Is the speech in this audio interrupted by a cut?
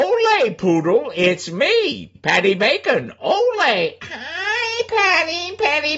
yes; 1 cut; at 2.1 s

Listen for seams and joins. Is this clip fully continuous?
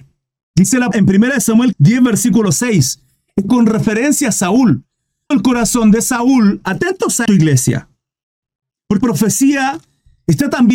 no; 6 cuts; at 0.9 s, 1.7 s, 3.5 s, 5.3 s, 7.3 s, 9.0 s

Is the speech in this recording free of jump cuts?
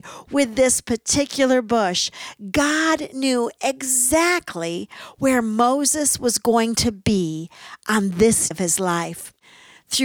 no; 1 cut; at 8.5 s

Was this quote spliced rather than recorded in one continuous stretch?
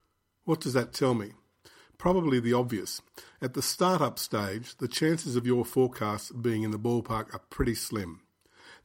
no; 0 cuts

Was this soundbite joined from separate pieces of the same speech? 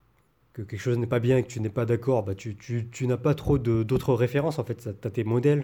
no; 0 cuts

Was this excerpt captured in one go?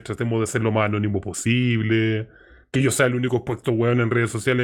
yes; 0 cuts

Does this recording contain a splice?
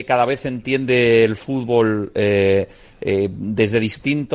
no; 0 cuts

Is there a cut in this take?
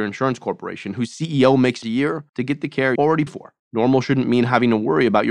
yes; 5 cuts; at 1.8 s, 2.3 s, 3.0 s, 3.3 s, 3.6 s

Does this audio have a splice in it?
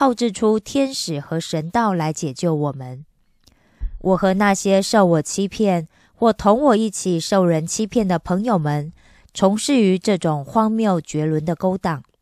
no; 0 cuts

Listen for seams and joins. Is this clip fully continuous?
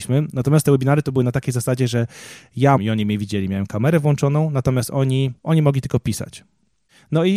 no; 2 cuts; at 2.8 s, 5.4 s

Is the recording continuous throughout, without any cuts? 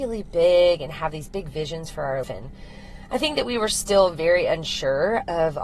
no; 1 cut; at 2.2 s

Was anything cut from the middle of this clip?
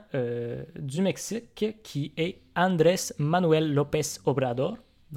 no; 0 cuts

